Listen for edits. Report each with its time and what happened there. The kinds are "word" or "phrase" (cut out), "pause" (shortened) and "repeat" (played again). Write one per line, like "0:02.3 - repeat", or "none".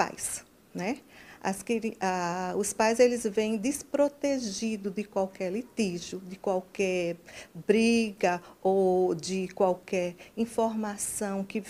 none